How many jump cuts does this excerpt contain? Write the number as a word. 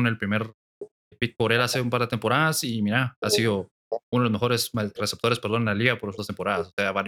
four